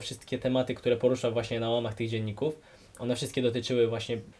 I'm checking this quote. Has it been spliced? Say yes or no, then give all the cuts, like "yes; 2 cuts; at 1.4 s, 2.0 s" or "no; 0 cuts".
no; 0 cuts